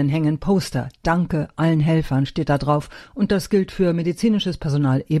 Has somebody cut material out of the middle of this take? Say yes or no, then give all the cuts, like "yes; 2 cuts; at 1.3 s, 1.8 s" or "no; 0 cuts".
no; 0 cuts